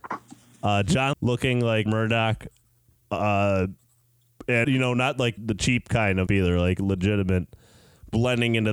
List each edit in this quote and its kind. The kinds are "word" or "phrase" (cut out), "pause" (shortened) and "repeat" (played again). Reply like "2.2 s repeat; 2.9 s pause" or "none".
1.1 s word; 1.9 s word; 4.6 s word; 5.4 s word; 6.3 s word